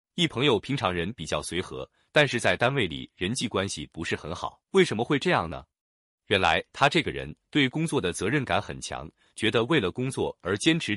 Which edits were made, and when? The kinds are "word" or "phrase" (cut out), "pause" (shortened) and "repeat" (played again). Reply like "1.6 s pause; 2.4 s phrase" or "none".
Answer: 4.6 s pause